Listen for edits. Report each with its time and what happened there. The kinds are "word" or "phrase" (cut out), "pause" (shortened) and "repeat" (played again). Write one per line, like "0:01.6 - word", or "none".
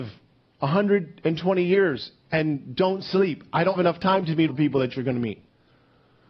0:03.7 - word
0:04.5 - word